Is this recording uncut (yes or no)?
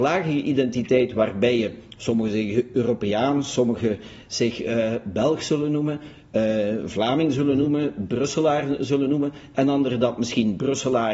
yes